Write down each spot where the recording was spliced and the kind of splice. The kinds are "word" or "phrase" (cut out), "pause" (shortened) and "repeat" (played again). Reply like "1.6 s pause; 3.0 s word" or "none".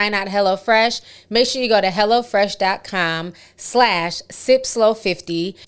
none